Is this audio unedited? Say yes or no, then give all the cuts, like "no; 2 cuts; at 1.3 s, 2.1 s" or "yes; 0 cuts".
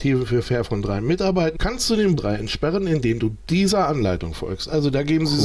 no; 2 cuts; at 1.5 s, 2.2 s